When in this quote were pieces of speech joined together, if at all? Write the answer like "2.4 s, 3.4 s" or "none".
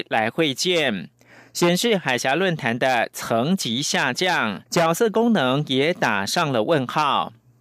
4.7 s